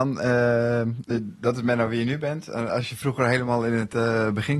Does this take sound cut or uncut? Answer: uncut